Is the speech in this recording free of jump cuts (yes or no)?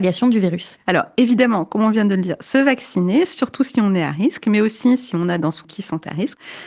no